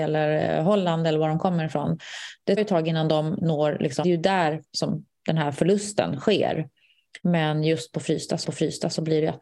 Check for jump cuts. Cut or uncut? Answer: cut